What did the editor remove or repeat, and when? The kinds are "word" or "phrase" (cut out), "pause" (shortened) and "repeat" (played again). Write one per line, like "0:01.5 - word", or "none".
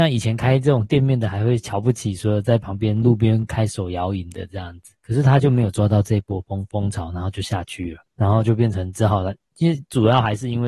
0:05.0 - pause
0:08.1 - pause